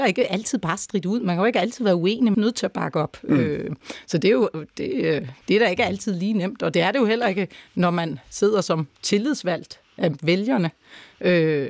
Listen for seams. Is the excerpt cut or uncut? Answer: cut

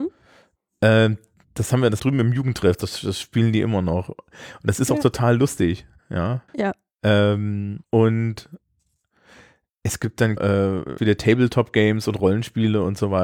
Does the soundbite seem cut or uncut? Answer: cut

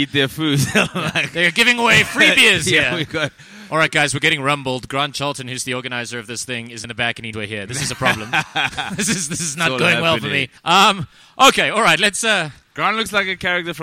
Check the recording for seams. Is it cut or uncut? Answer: cut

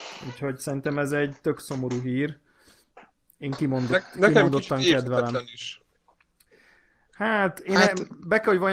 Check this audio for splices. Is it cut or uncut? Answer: uncut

